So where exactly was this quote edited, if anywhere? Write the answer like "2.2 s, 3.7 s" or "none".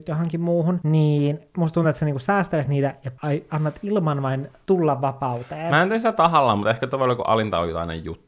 none